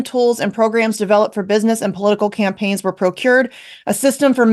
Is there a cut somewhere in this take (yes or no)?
no